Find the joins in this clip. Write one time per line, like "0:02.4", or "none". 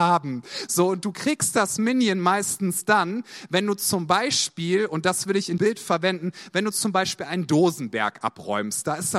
0:05.6

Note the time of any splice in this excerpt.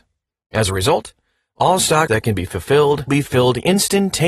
0:02.1
0:03.1

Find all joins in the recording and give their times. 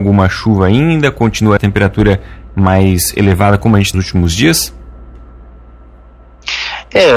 0:01.6
0:03.9

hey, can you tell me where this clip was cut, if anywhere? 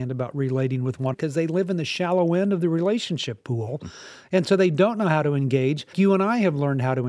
0:01.1
0:05.9

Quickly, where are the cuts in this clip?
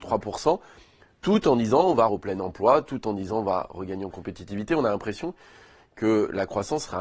0:02.1

